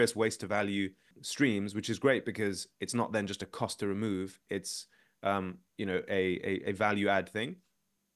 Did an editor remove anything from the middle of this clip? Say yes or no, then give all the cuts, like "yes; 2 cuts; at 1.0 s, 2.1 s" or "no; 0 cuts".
no; 0 cuts